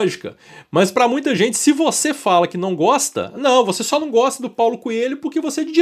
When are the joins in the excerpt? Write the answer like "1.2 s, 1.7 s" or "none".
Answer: none

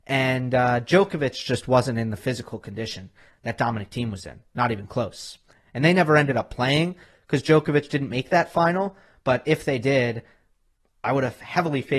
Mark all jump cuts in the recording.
none

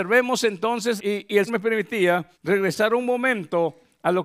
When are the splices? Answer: 1.0 s, 1.5 s, 2.3 s

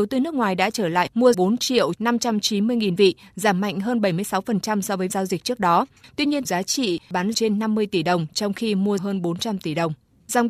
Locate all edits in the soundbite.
1.3 s, 3.0 s, 5.1 s, 6.4 s, 7.3 s, 9.0 s

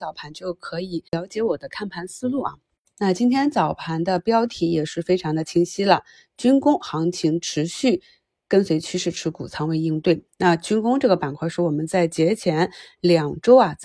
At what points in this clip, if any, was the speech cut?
1.1 s

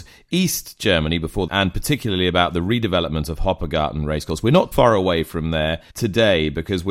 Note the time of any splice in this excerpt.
1.5 s, 4.7 s, 5.9 s

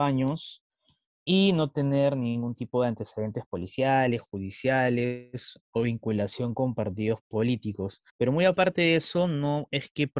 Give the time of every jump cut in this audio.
8.1 s

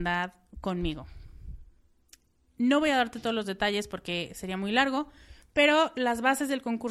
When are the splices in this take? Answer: none

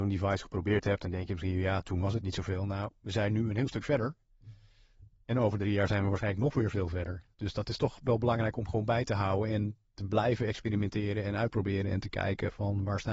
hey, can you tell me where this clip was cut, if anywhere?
7.3 s

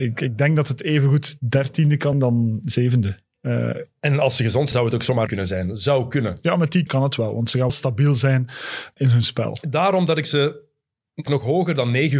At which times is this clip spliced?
2.1 s, 4.7 s, 5.3 s, 6.9 s, 7.7 s, 9.0 s, 11.3 s

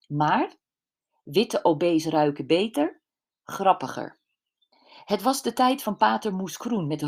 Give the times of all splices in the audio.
none

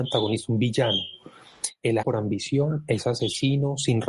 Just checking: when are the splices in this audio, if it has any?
2.0 s

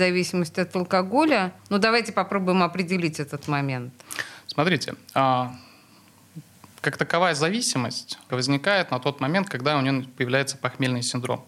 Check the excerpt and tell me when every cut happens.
1.6 s, 8.3 s

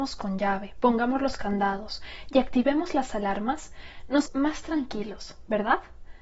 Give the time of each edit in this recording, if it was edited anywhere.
4.3 s

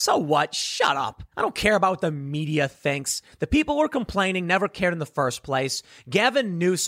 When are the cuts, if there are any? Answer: 1.3 s

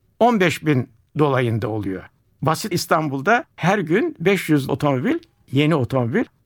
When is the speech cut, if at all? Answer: 2.7 s, 3.5 s, 4.7 s

